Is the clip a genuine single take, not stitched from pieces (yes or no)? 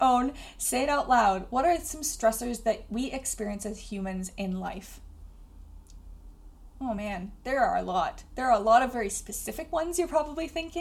yes